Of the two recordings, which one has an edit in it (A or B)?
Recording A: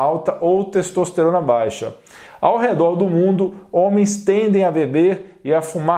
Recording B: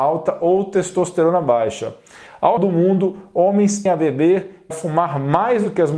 B